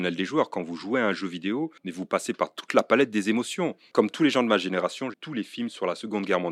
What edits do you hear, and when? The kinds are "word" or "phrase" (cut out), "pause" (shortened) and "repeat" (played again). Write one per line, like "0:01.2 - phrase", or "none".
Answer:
0:01.8 - pause
0:05.1 - word